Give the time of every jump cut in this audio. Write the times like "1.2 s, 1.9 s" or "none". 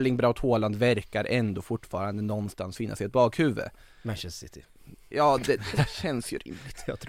none